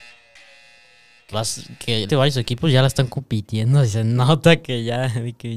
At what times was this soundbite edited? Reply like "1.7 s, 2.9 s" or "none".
1.3 s, 2.1 s